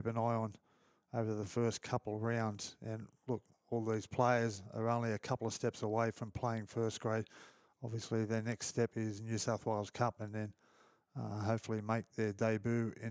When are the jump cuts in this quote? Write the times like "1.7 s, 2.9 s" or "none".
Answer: none